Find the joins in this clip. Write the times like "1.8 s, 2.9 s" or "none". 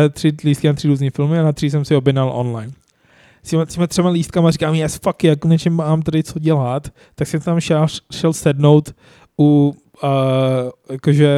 none